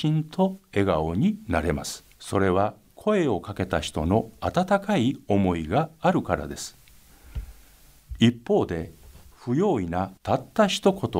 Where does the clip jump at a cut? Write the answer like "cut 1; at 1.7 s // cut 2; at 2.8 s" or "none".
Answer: cut 1; at 2.1 s // cut 2; at 10.2 s